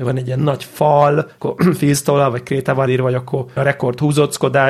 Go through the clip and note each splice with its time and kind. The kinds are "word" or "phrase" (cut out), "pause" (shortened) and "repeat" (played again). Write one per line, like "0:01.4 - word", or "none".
0:01.4 - word
0:02.9 - word
0:03.6 - word